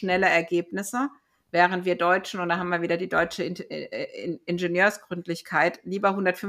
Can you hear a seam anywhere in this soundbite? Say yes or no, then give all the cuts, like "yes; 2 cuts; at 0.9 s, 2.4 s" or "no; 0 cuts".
no; 0 cuts